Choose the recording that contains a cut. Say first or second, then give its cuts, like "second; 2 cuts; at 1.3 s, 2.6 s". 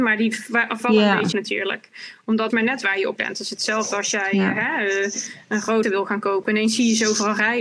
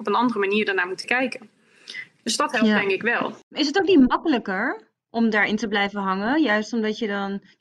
first; 4 cuts; at 1.3 s, 2.5 s, 3.2 s, 5.8 s